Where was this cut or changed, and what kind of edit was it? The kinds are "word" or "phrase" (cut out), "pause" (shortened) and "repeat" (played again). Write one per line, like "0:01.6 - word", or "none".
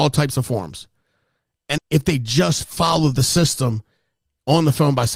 0:01.8 - word